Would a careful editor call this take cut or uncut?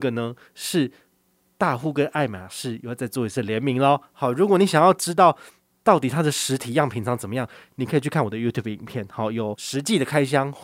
uncut